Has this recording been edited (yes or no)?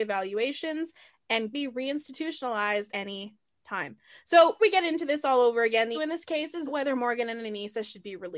yes